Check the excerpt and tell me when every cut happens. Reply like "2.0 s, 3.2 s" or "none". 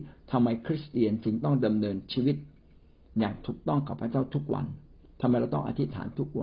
none